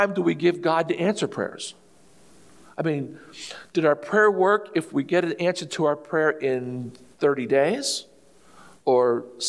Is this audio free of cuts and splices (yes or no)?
yes